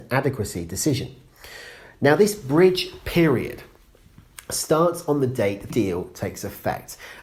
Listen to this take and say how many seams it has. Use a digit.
1